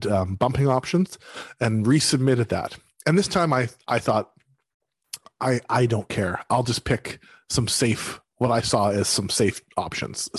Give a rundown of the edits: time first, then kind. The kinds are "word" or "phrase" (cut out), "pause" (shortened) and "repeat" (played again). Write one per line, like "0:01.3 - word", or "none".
none